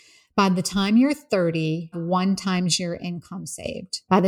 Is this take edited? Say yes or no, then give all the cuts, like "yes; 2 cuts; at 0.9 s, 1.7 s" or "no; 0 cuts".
yes; 1 cut; at 1.9 s